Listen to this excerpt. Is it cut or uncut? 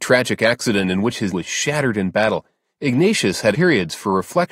cut